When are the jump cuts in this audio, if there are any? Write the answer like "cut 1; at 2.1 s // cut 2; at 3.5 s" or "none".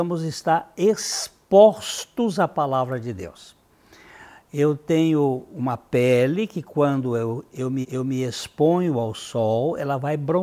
cut 1; at 7.8 s

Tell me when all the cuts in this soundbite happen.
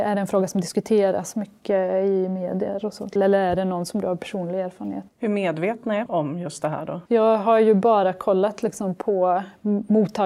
cut 1; at 3.2 s // cut 2; at 5.1 s // cut 3; at 6.1 s // cut 4; at 7.1 s

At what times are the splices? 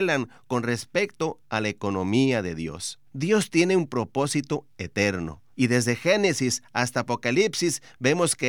cut 1; at 3.1 s // cut 2; at 5.5 s

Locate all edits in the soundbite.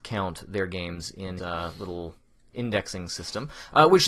cut 1; at 1.4 s

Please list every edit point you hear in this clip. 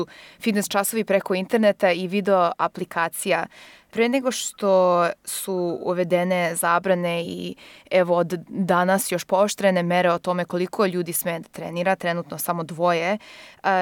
none

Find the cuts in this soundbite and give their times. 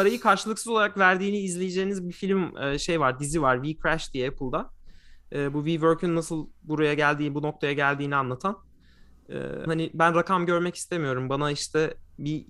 cut 1; at 9.7 s

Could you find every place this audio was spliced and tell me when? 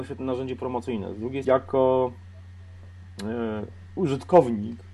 cut 1; at 1.4 s

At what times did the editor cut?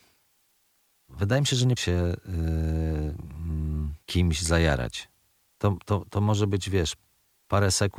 cut 1; at 1.8 s // cut 2; at 4.0 s

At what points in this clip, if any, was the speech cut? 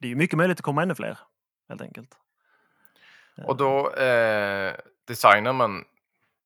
none

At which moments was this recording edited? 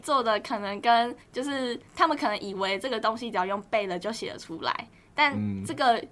cut 1; at 1.2 s // cut 2; at 1.9 s

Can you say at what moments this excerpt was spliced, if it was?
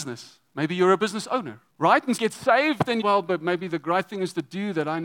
cut 1; at 1.7 s // cut 2; at 2.2 s // cut 3; at 3.0 s

